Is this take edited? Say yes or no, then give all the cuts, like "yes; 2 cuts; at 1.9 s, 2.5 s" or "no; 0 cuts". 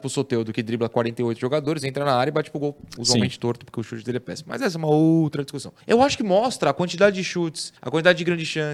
yes; 2 cuts; at 5.8 s, 7.8 s